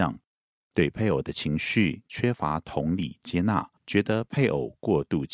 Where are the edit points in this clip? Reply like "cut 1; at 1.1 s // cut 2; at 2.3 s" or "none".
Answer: cut 1; at 3.8 s